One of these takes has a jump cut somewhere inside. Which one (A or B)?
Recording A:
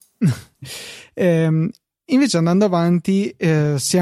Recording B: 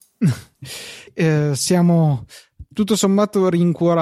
B